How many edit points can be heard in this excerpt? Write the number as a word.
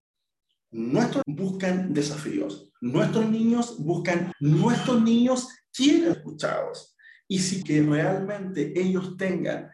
five